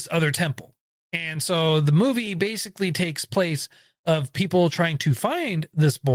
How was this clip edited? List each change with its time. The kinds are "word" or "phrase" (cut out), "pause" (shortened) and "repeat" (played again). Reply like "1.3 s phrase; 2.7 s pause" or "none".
none